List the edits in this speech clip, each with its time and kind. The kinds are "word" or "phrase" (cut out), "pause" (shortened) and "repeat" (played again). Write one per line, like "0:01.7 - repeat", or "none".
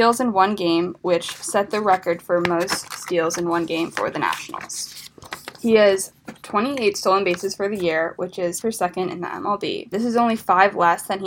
0:08.6 - word
0:09.9 - word